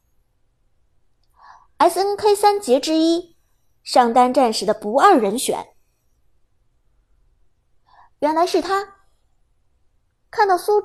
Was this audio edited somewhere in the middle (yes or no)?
no